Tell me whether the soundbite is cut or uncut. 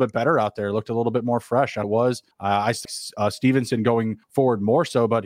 cut